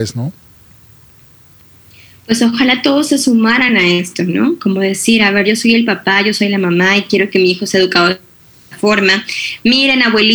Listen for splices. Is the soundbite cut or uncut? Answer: uncut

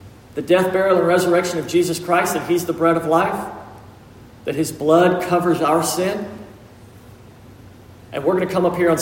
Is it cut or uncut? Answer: uncut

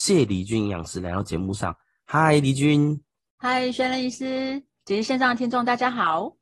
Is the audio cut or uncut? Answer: cut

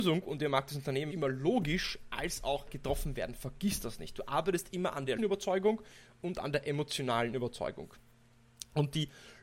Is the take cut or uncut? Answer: cut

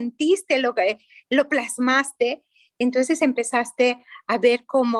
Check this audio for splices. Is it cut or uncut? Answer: uncut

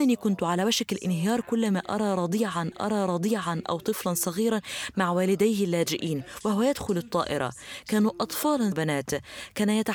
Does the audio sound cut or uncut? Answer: cut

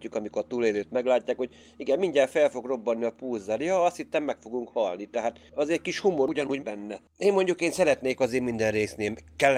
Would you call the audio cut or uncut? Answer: cut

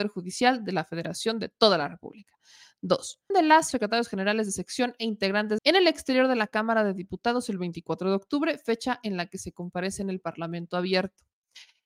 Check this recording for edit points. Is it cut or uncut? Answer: cut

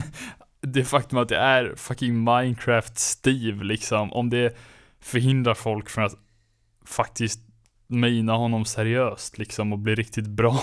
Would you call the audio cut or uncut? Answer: uncut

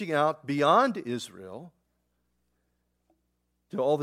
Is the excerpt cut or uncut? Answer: uncut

